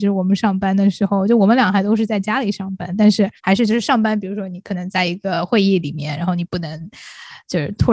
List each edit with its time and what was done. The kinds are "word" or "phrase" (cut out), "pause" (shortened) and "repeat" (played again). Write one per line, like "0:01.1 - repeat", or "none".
0:03.4 - pause